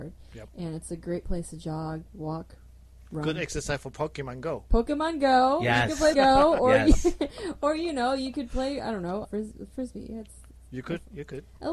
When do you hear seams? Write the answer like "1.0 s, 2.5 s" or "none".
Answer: 2.1 s, 6.1 s, 9.2 s